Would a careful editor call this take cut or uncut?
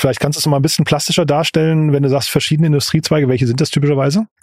uncut